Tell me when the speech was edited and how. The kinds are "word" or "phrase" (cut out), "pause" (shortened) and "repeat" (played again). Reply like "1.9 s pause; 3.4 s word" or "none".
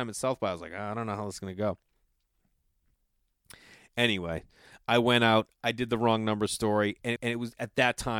7.2 s repeat